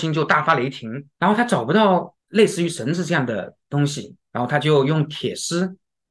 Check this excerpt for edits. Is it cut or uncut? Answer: cut